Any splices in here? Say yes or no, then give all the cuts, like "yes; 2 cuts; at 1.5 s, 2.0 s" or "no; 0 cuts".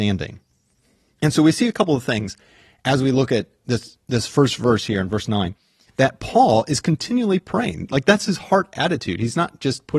no; 0 cuts